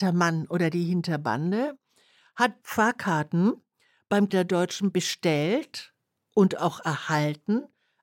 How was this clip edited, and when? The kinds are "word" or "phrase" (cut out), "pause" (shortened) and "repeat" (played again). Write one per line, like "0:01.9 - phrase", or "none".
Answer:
0:02.6 - word
0:04.3 - word
0:04.9 - word